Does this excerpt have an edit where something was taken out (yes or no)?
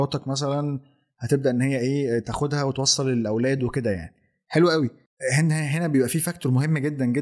no